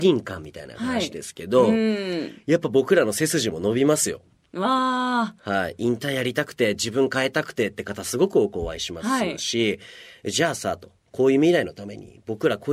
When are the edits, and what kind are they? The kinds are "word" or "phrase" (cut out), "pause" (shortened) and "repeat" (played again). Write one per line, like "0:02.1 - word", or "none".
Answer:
none